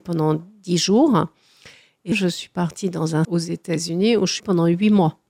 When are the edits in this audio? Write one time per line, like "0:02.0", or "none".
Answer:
0:02.1
0:03.2
0:04.4